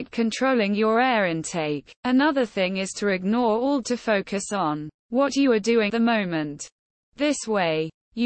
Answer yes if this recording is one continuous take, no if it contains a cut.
no